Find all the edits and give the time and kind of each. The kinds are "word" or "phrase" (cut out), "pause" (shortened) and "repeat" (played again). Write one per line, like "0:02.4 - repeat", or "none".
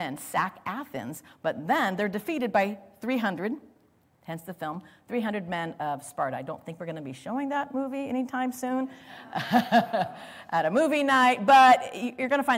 none